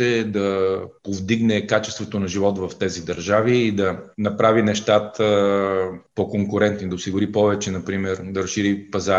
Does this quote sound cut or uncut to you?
cut